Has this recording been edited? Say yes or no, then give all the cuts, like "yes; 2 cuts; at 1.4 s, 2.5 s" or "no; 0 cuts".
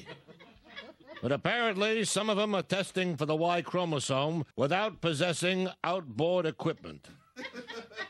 yes; 2 cuts; at 3.2 s, 4.5 s